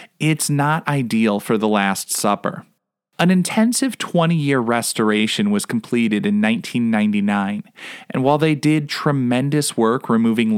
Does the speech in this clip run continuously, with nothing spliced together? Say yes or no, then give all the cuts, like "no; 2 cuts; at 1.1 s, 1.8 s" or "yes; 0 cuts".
yes; 0 cuts